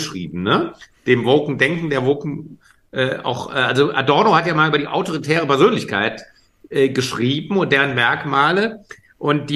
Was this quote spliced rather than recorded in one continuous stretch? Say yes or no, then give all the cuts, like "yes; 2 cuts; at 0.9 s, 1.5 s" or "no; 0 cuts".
no; 0 cuts